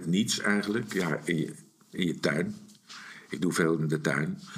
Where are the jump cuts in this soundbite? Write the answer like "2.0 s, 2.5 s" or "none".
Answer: none

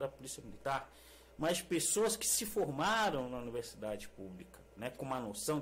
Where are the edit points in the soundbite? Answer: none

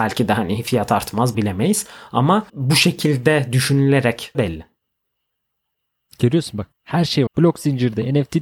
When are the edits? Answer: 1.3 s, 2.5 s, 4.3 s, 6.7 s, 7.3 s

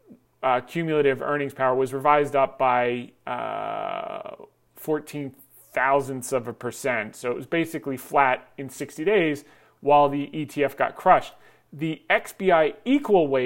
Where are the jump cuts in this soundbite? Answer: none

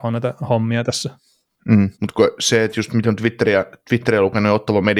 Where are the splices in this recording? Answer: 1.9 s, 3.0 s

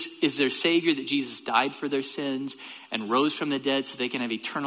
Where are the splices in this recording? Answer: none

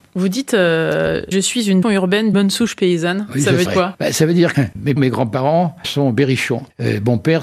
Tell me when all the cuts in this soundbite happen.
1.3 s, 1.8 s, 2.3 s, 3.7 s, 4.5 s, 5.0 s, 5.8 s

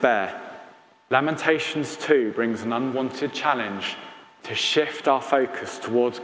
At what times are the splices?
none

